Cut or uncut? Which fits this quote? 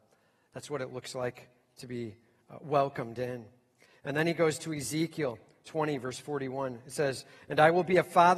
uncut